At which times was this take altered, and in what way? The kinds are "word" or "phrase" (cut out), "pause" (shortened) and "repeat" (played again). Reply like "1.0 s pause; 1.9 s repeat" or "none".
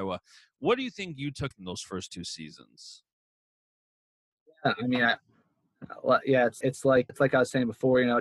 1.5 s word; 6.6 s word; 7.1 s word